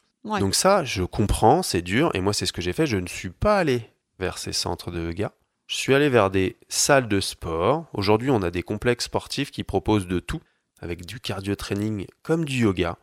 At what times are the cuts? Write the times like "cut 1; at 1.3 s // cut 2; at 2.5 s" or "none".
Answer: none

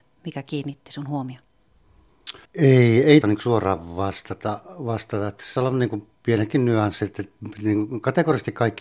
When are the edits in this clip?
cut 1; at 2.4 s // cut 2; at 3.2 s // cut 3; at 5.6 s // cut 4; at 6.1 s

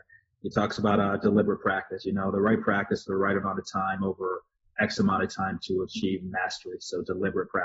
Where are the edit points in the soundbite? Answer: none

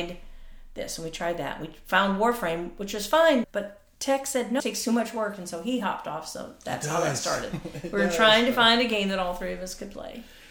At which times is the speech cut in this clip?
cut 1; at 3.4 s // cut 2; at 4.6 s

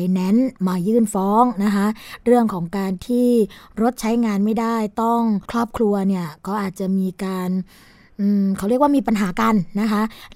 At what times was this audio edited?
cut 1; at 5.5 s

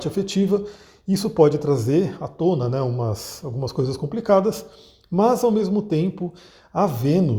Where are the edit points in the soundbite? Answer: none

